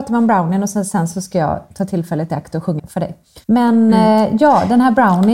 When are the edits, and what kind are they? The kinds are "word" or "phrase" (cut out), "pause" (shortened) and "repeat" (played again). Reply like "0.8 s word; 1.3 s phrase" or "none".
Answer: 2.8 s word; 3.4 s pause